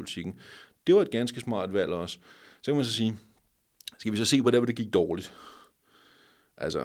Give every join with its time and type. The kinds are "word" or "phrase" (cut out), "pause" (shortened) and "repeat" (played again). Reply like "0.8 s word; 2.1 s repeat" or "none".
none